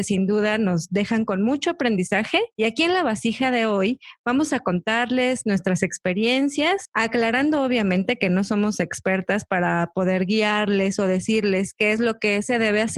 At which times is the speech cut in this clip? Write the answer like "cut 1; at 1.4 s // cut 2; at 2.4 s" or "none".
none